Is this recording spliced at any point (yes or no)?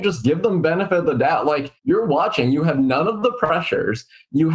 yes